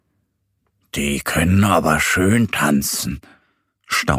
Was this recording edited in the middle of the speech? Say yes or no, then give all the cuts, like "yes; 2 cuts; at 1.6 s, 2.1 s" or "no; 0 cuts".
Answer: no; 0 cuts